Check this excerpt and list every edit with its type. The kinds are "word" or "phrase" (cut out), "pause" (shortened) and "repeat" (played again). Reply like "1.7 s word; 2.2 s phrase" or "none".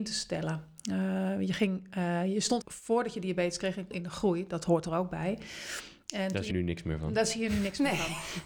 2.6 s word; 3.9 s phrase; 6.5 s word